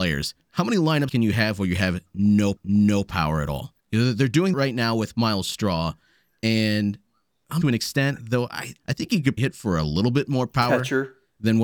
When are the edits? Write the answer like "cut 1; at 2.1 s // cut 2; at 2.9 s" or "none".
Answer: cut 1; at 1.1 s // cut 2; at 2.6 s // cut 3; at 3.8 s // cut 4; at 4.5 s // cut 5; at 7.6 s // cut 6; at 8.8 s // cut 7; at 9.4 s